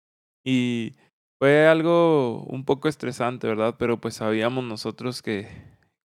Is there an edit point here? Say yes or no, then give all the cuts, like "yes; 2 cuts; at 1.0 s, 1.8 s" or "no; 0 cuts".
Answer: yes; 1 cut; at 1.1 s